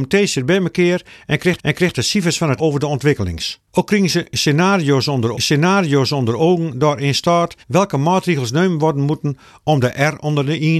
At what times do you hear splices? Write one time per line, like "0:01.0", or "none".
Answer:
0:01.6
0:02.6
0:03.7
0:05.3
0:07.6